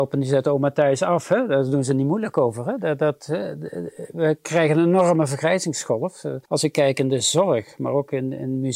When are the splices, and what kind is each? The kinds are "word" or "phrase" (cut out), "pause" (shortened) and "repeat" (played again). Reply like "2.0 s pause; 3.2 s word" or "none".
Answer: 6.5 s pause